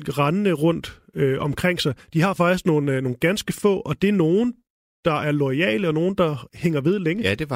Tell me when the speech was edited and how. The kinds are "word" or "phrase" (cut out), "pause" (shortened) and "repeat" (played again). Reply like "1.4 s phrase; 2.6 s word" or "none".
none